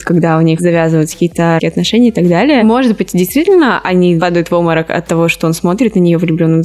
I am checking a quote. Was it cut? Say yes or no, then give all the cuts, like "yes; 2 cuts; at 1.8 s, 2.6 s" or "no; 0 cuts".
yes; 1 cut; at 1.6 s